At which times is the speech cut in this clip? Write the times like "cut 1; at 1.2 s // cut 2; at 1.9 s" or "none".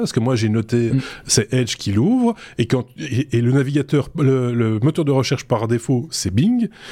cut 1; at 0.9 s